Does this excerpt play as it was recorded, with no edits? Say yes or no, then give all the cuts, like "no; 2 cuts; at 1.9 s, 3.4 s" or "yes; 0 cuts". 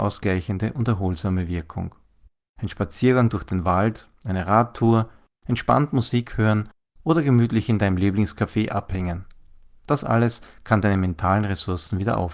yes; 0 cuts